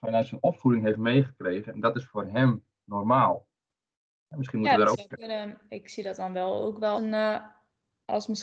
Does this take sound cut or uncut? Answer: cut